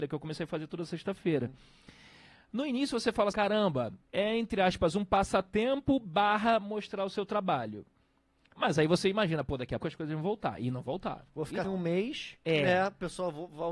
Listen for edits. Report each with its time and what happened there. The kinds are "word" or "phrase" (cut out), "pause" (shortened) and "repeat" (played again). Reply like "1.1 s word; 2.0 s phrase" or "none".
3.3 s word; 4.0 s word; 9.8 s word; 11.6 s word